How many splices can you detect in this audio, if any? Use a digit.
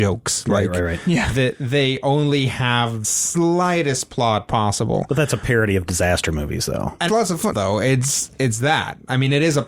3